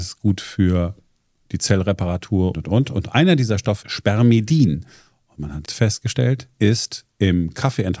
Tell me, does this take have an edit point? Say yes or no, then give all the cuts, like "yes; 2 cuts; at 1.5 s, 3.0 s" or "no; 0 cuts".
yes; 4 cuts; at 2.5 s, 3.8 s, 5.7 s, 6.5 s